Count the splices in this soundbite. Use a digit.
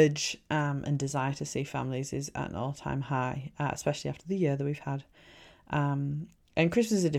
0